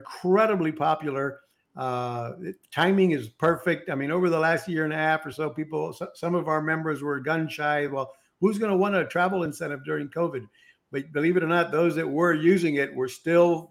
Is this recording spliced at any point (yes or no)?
no